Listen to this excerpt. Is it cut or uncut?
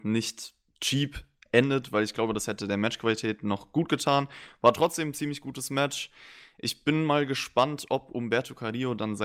uncut